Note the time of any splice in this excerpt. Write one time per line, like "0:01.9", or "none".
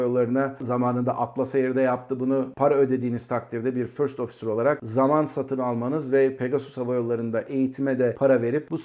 none